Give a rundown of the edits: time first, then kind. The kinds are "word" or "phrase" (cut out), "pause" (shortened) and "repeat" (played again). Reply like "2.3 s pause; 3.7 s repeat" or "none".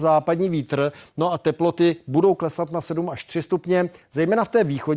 none